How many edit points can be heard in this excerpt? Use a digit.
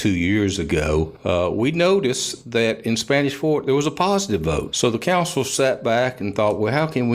0